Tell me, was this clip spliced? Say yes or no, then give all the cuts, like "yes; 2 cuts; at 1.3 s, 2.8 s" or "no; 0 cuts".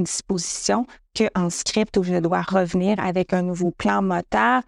no; 0 cuts